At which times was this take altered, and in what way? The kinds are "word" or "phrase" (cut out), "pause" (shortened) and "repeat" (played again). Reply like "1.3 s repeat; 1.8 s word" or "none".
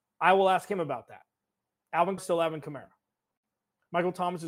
2.2 s word